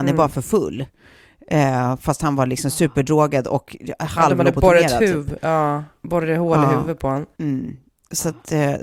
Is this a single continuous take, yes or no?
no